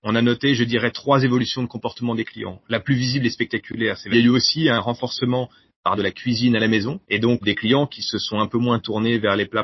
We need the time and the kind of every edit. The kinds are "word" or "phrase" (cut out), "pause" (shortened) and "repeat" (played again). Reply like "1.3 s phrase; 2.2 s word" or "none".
4.1 s phrase; 6.0 s word; 7.0 s pause; 7.4 s word

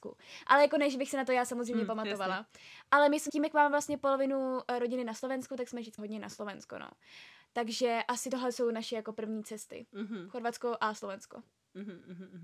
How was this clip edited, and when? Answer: 3.3 s word; 6.0 s word

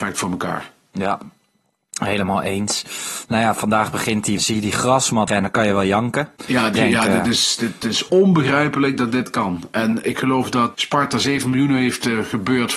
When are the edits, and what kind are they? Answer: 4.4 s phrase; 5.3 s word; 6.4 s pause; 6.8 s word; 8.1 s word; 10.0 s word; 10.7 s word

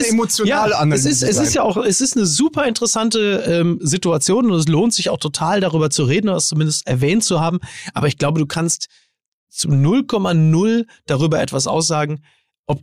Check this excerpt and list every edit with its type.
none

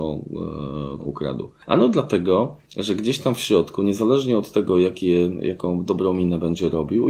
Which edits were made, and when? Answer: 1.0 s word; 2.6 s pause

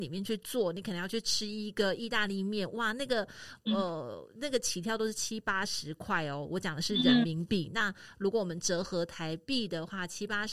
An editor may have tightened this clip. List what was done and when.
none

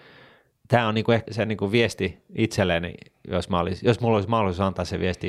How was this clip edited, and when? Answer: 1.3 s word

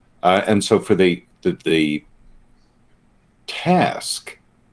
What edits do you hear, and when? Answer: 1.6 s word

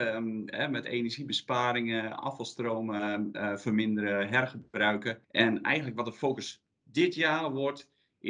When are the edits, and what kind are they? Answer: 5.2 s pause

